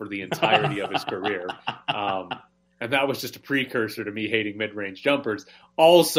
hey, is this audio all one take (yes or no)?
yes